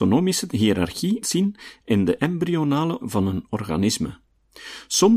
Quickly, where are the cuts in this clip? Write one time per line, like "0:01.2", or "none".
0:01.2
0:03.0